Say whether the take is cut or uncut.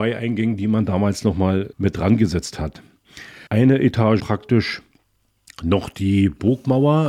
cut